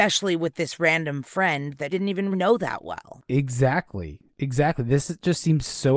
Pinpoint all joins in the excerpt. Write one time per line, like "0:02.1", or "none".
0:01.9
0:02.3

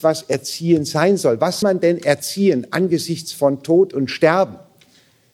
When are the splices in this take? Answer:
0:01.6

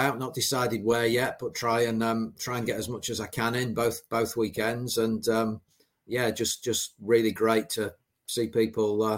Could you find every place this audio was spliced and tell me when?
none

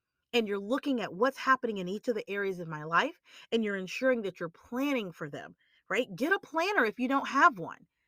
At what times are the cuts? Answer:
none

